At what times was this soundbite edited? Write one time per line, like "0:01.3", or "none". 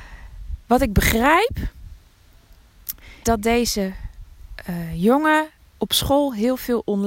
0:03.2
0:05.6